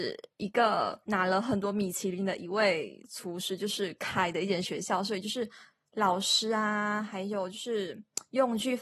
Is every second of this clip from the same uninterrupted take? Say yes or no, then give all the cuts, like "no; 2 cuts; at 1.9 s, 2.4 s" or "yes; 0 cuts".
no; 1 cut; at 1.0 s